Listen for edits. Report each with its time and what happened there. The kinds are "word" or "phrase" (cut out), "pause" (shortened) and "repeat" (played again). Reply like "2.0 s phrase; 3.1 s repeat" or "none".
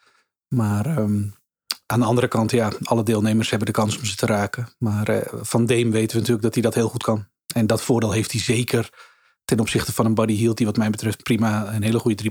none